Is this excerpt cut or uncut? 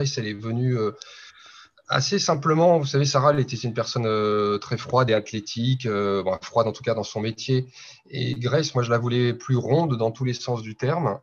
uncut